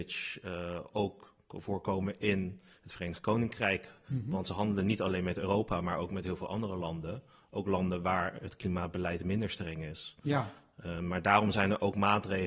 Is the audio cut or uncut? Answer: uncut